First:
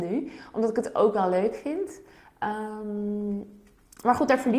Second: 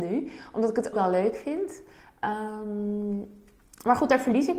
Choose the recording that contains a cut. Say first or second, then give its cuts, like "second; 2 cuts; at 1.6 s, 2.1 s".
second; 1 cut; at 0.9 s